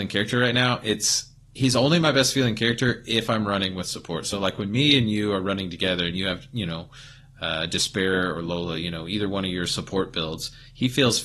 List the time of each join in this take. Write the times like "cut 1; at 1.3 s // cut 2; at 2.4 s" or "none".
none